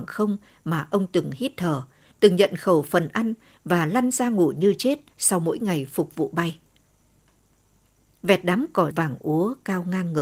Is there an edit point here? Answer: yes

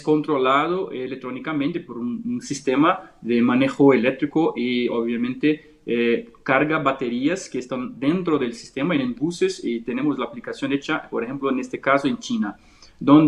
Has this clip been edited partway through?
no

